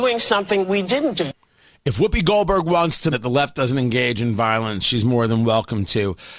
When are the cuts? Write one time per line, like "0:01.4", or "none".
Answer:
0:01.5
0:03.1

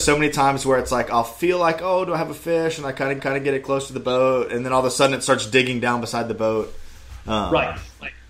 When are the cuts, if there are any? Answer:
0:03.2

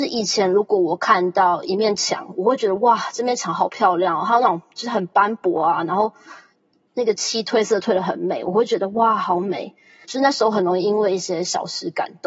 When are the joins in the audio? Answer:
none

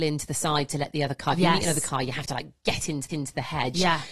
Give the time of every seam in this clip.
0:03.1

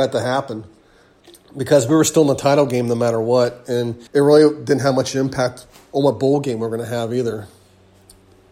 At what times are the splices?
0:01.2
0:04.1

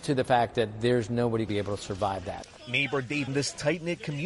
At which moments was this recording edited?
0:01.5
0:02.6
0:03.3

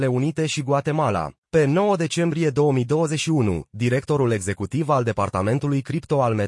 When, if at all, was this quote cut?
0:01.4

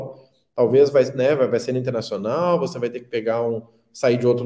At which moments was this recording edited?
none

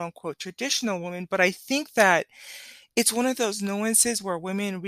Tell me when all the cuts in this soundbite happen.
none

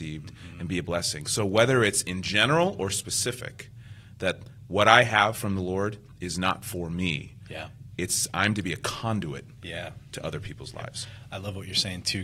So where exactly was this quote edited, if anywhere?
none

